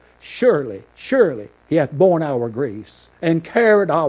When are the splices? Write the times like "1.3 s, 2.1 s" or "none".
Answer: 1.6 s, 3.1 s